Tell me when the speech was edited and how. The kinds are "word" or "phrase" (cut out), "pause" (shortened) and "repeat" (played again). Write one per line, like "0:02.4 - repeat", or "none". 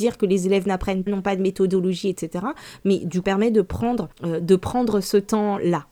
0:01.1 - word
0:03.2 - phrase
0:04.1 - pause